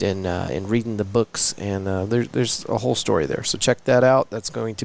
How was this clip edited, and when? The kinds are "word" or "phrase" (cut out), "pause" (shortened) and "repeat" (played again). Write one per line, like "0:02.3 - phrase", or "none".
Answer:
none